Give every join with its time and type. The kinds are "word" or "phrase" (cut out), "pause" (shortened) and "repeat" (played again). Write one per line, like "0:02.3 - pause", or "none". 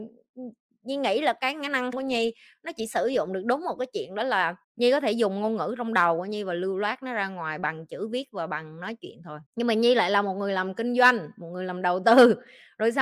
0:01.9 - phrase
0:04.6 - pause
0:09.5 - pause